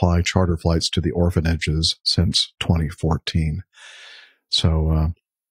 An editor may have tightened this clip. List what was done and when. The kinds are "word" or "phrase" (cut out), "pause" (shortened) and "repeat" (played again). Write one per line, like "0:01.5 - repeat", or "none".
none